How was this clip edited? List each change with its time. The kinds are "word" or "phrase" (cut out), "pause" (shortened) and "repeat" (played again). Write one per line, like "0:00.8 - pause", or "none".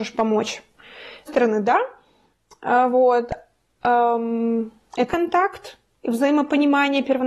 0:01.3 - word
0:05.1 - word